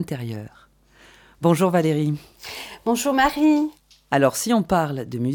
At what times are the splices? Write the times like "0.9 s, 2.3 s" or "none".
none